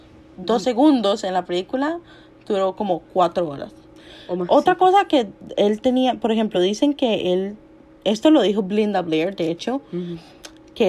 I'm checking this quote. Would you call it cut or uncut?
uncut